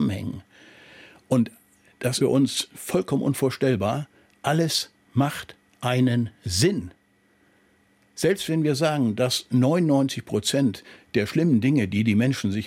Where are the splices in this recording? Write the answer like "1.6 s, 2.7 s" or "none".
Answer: 2.2 s